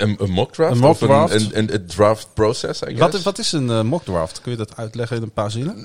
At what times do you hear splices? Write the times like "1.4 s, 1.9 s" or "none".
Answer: none